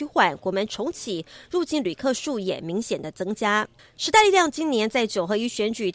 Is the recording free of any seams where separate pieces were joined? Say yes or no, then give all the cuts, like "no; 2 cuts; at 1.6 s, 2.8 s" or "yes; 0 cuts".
yes; 0 cuts